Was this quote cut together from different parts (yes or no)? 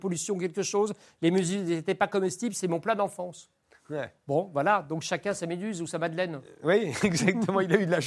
no